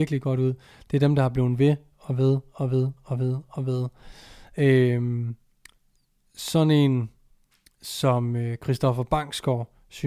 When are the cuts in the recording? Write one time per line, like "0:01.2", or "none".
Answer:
none